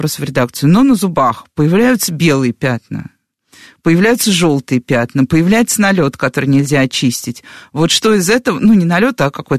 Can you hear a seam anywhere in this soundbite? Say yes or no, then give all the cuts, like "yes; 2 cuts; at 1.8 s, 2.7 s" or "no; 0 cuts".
no; 0 cuts